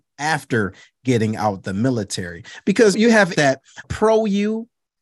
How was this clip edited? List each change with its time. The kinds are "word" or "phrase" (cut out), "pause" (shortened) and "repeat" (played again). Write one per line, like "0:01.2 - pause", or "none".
0:02.9 - phrase
0:03.3 - word
0:03.8 - word